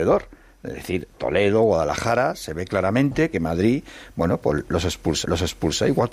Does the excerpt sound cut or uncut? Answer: cut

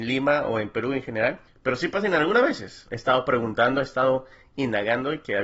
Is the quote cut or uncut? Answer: uncut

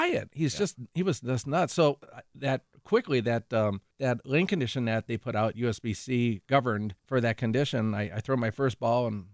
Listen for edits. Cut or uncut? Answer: cut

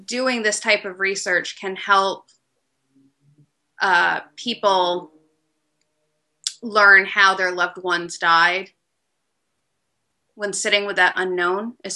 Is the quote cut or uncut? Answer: uncut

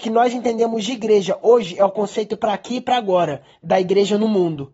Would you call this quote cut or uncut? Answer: uncut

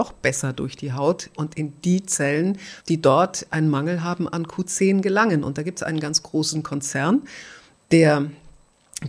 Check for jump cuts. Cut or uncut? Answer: cut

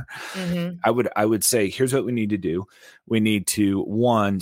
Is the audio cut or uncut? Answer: uncut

